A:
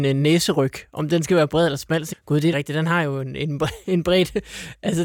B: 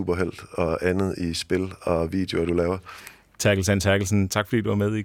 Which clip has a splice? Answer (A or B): A